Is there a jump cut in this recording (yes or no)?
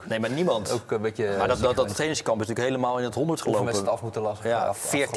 no